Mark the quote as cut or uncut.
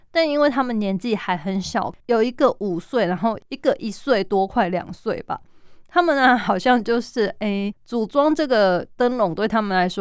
cut